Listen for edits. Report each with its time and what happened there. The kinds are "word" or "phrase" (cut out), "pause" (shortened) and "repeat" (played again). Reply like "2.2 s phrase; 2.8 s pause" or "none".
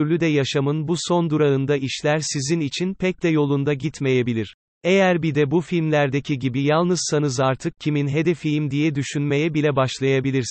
4.7 s pause